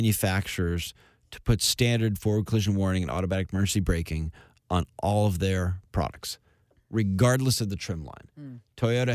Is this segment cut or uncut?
uncut